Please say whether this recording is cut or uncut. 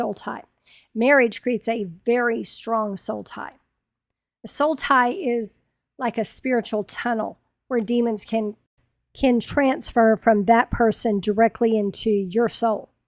uncut